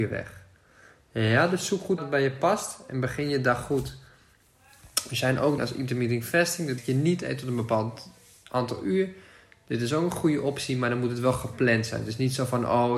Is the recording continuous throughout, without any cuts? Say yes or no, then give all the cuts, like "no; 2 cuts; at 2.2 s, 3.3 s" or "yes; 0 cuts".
no; 3 cuts; at 2.0 s, 5.6 s, 6.8 s